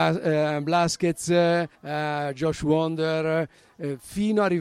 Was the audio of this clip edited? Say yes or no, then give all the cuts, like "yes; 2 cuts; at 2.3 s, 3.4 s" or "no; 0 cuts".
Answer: yes; 1 cut; at 1.8 s